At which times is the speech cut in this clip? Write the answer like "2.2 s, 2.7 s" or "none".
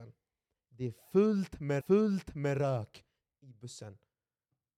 1.8 s